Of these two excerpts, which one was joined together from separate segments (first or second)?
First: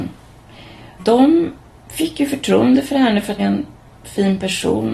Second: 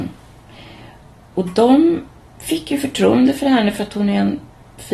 first